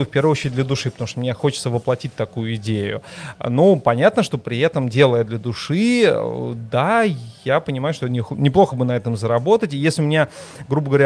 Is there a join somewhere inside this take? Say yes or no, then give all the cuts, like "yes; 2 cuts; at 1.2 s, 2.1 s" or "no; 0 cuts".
no; 0 cuts